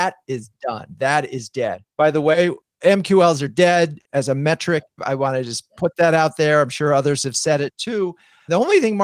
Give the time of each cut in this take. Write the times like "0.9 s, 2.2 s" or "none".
none